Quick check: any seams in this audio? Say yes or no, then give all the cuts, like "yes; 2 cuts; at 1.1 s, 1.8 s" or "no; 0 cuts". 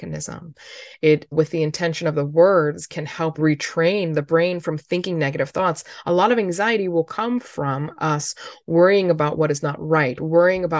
yes; 2 cuts; at 1.3 s, 3.4 s